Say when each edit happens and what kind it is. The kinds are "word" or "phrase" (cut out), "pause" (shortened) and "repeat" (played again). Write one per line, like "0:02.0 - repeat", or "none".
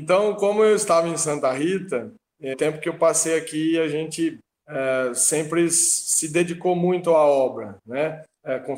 0:02.5 - word